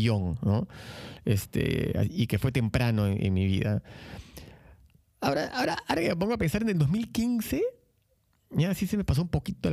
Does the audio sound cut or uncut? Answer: uncut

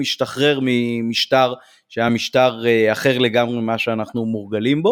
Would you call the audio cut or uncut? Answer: uncut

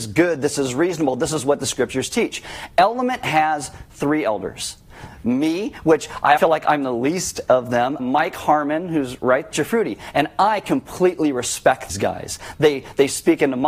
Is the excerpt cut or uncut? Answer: cut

